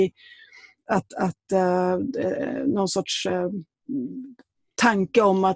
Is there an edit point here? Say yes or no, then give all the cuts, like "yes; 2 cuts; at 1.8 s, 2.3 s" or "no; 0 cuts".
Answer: no; 0 cuts